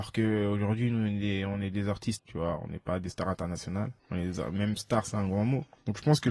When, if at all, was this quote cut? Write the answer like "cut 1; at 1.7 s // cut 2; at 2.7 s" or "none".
cut 1; at 2.2 s // cut 2; at 4.0 s